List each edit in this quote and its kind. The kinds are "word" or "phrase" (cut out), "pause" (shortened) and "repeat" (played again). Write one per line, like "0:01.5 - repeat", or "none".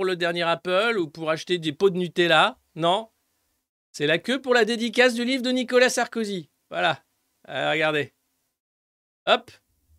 none